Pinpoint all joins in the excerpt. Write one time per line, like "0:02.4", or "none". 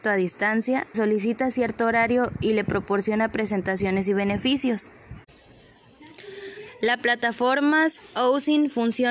0:00.9